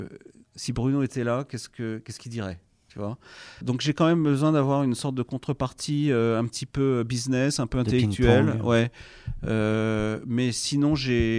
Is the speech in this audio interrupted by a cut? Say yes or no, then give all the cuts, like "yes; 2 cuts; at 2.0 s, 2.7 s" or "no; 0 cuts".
yes; 1 cut; at 3.6 s